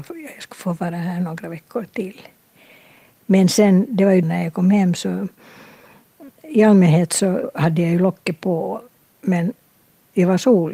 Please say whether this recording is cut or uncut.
cut